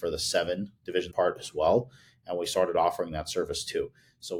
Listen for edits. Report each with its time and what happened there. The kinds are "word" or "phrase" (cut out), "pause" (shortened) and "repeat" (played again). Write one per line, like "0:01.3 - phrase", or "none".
0:01.1 - word